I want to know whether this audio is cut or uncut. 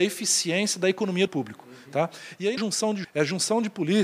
cut